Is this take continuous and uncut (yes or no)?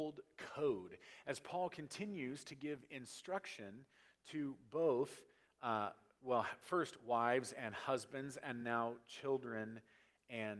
yes